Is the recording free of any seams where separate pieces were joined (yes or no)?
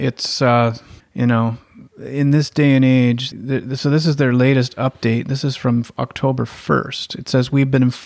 no